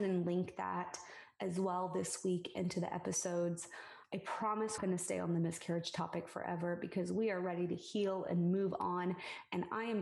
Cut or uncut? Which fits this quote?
cut